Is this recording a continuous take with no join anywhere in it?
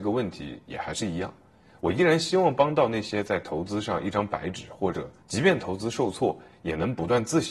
yes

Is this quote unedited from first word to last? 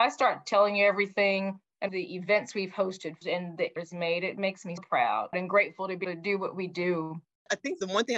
no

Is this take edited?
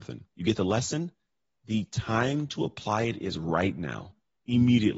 no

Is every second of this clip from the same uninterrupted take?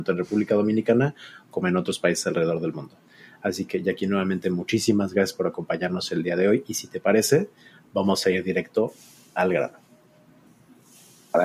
yes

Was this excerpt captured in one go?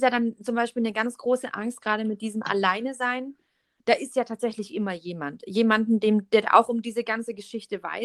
yes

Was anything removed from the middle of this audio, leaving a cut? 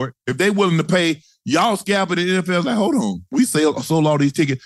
yes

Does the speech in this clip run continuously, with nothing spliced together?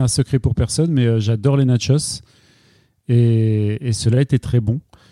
yes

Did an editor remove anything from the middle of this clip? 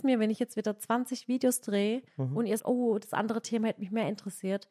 yes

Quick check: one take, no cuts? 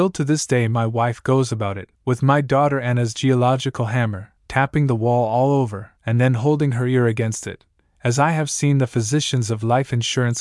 no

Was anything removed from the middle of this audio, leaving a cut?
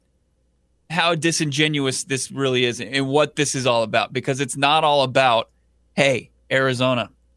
no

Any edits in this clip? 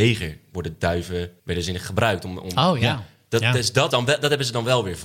yes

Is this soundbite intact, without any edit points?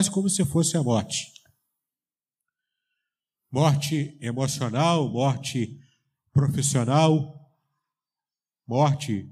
yes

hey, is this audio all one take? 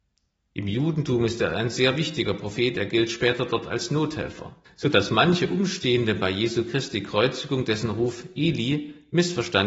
no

